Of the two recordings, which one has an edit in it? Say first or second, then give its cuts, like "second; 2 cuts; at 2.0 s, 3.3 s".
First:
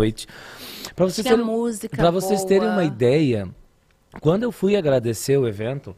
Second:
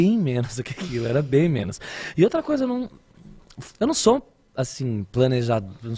second; 1 cut; at 3.7 s